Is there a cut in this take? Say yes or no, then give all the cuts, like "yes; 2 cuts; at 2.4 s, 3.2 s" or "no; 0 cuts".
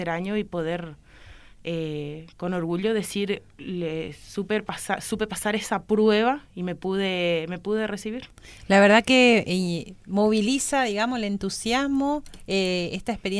yes; 1 cut; at 10.0 s